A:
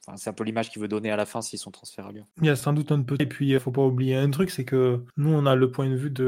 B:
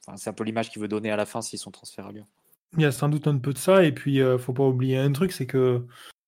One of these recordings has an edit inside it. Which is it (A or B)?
A